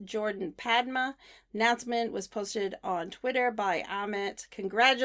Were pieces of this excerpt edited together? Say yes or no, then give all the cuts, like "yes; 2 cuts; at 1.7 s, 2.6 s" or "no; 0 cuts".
no; 0 cuts